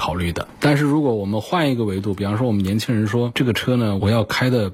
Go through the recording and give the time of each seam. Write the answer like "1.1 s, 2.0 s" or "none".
3.3 s